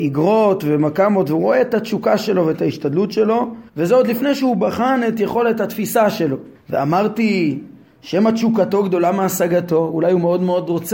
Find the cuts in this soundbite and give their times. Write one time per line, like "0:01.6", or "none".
0:03.7
0:06.5